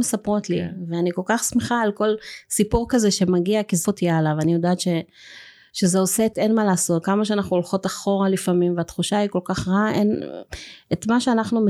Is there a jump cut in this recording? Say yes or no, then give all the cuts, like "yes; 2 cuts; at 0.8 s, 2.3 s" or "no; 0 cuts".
yes; 3 cuts; at 3.8 s, 6.3 s, 7.0 s